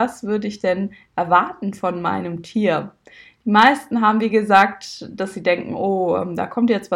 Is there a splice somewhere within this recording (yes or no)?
no